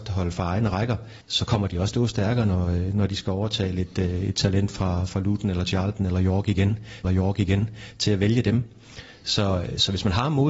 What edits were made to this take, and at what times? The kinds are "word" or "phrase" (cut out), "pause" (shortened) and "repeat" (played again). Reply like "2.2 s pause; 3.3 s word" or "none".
1.2 s pause; 1.9 s phrase; 7.0 s repeat